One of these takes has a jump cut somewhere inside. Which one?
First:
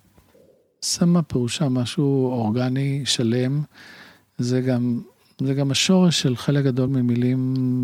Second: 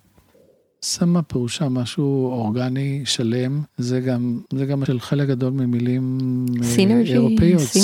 second; 3 cuts; at 3.7 s, 4.5 s, 4.9 s

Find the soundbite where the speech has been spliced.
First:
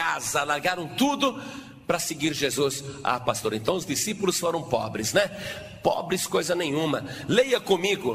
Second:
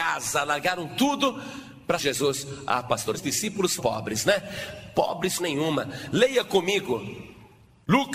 second; 4 cuts; at 2.0 s, 3.1 s, 3.8 s, 5.4 s

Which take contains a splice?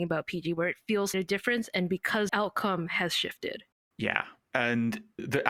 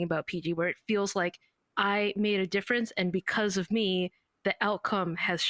first; 2 cuts; at 1.1 s, 2.3 s

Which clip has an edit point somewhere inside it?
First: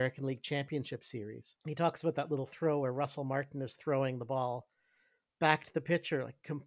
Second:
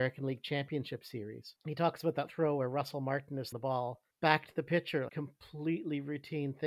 second; 4 cuts; at 2.3 s, 3.5 s, 4.1 s, 5.1 s

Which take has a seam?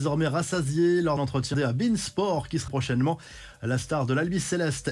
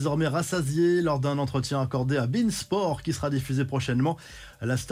first; 3 cuts; at 1.2 s, 1.5 s, 2.7 s

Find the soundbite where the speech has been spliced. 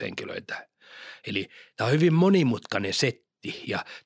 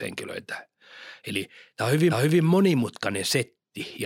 second; 1 cut; at 2.1 s

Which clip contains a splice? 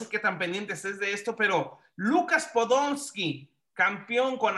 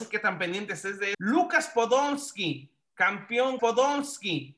second; 2 cuts; at 1.1 s, 3.6 s

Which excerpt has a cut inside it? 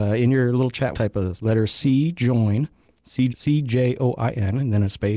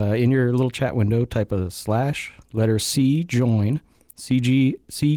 first; 3 cuts; at 0.9 s, 1.4 s, 3.3 s

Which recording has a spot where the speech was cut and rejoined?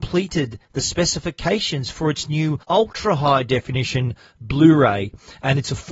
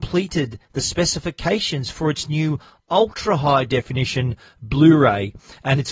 first; 1 cut; at 2.6 s

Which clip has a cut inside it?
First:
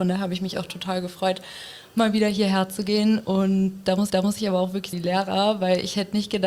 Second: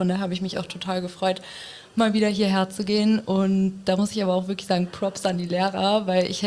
first; 2 cuts; at 4.1 s, 4.9 s

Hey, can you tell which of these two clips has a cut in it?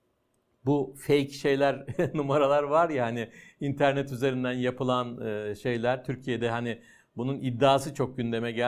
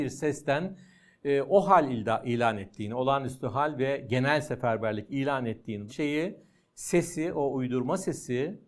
second; 1 cut; at 5.9 s

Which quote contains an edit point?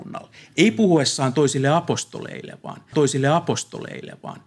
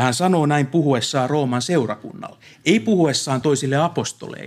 first; 1 cut; at 2.9 s

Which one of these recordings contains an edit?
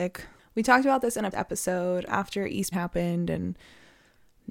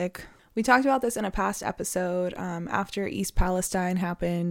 first; 3 cuts; at 1.3 s, 2.1 s, 2.7 s

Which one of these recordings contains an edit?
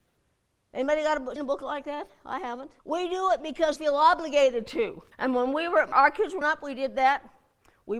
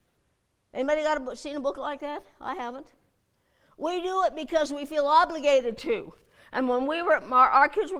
first; 6 cuts; at 1.4 s, 2.8 s, 3.8 s, 5.1 s, 5.9 s, 6.4 s

